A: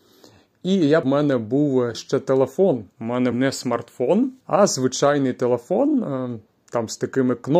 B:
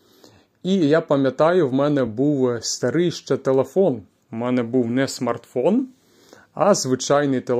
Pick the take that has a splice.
A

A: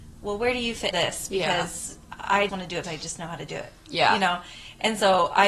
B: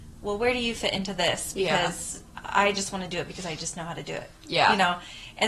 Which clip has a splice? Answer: A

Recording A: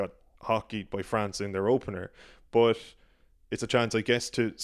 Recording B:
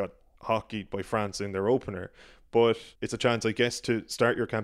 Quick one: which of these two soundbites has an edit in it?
B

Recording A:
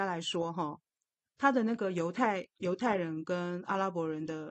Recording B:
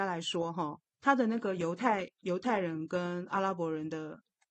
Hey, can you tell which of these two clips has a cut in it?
B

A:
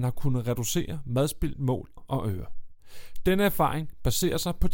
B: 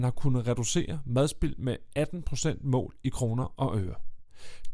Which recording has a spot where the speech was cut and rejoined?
A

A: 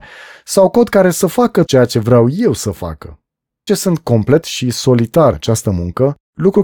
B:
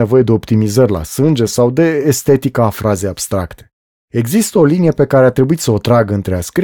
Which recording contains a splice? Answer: A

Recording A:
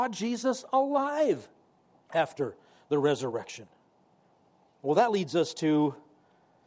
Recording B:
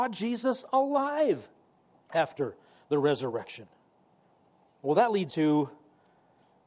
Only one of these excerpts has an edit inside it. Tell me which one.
B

